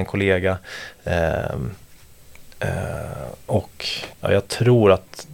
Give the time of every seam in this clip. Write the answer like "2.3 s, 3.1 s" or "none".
4.1 s